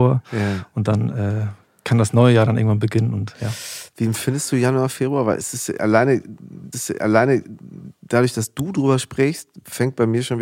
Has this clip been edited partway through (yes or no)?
yes